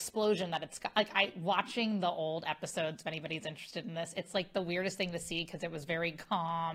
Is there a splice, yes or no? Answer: no